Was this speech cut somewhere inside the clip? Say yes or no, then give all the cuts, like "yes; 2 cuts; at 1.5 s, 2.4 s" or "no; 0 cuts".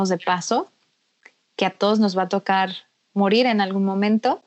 no; 0 cuts